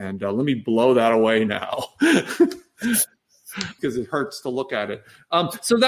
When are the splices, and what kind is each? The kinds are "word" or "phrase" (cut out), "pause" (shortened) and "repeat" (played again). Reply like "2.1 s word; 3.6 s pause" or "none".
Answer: 3.8 s word